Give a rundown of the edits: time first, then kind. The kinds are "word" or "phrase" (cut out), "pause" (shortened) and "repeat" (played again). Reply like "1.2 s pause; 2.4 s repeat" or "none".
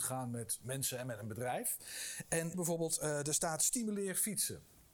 2.5 s phrase